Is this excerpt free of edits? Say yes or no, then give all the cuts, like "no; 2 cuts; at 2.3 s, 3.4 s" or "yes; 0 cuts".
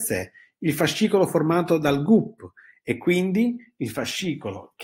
yes; 0 cuts